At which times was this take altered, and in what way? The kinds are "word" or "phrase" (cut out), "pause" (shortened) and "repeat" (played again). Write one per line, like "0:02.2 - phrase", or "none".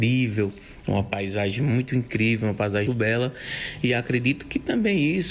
0:02.9 - word